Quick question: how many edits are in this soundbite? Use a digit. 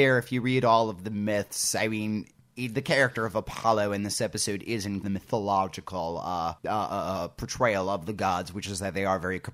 2